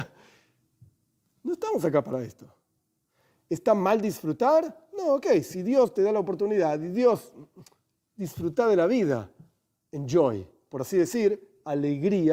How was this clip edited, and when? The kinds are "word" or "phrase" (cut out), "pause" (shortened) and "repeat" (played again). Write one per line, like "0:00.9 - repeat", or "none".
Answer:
none